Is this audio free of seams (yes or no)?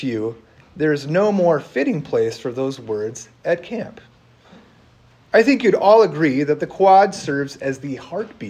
yes